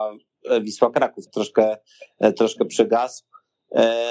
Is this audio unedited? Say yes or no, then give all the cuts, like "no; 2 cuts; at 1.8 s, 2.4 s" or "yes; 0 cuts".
no; 1 cut; at 1.3 s